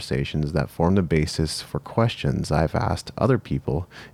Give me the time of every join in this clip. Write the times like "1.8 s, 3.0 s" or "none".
none